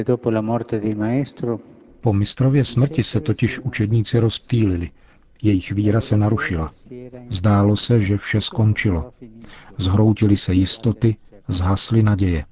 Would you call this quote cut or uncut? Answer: uncut